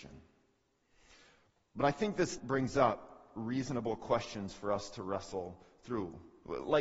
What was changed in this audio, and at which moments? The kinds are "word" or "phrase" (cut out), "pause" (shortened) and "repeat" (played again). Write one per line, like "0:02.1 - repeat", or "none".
0:02.4 - word